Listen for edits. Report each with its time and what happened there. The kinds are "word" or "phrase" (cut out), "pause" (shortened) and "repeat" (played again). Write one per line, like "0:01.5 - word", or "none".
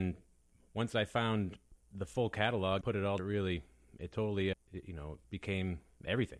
0:01.8 - pause
0:02.8 - word
0:03.2 - word
0:04.5 - word
0:05.2 - pause